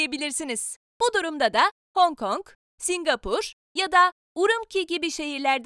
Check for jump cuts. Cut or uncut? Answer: uncut